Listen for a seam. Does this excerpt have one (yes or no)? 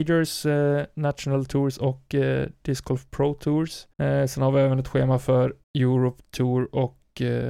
yes